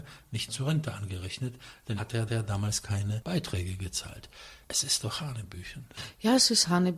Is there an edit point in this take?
yes; 2 cuts; at 2.0 s, 2.3 s

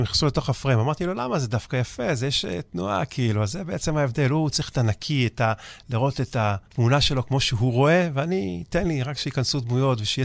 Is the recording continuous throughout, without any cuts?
no; 1 cut; at 6.7 s

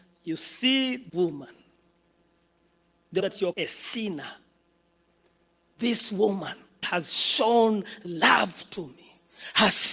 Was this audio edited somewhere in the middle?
yes; 4 cuts; at 1.1 s, 3.2 s, 3.5 s, 6.8 s

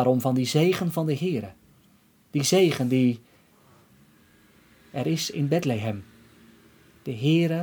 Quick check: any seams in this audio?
no; 0 cuts

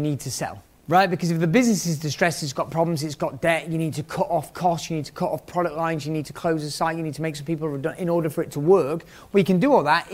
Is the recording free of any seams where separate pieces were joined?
yes; 0 cuts

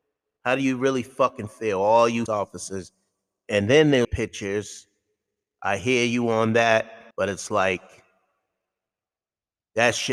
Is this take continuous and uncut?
no; 3 cuts; at 2.3 s, 4.0 s, 7.1 s

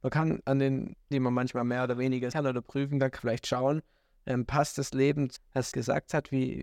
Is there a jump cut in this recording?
yes; 5 cuts; at 1.1 s, 2.3 s, 3.2 s, 5.4 s, 5.7 s

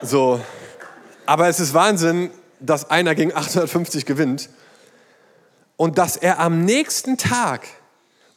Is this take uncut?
yes; 0 cuts

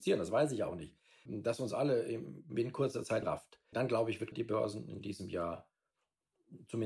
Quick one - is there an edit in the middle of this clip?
yes; 4 cuts; at 1.3 s, 3.2 s, 3.7 s, 4.3 s

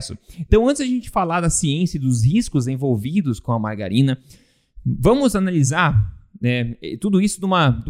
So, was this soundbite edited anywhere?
no; 0 cuts

